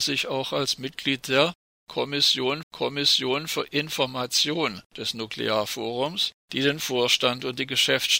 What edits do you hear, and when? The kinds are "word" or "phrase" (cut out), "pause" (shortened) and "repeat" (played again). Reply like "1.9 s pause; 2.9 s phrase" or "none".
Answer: 2.6 s repeat; 4.9 s pause; 6.4 s pause